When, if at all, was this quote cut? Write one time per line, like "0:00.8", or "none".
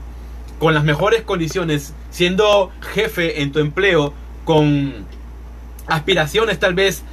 none